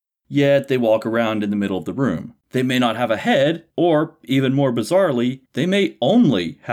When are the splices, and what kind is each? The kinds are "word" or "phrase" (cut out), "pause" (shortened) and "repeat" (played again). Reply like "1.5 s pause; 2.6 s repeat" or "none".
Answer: 2.4 s pause; 3.7 s pause; 5.5 s pause